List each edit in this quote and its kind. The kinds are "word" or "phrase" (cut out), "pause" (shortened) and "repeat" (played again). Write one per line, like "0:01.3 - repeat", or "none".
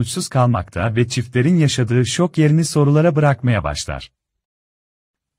none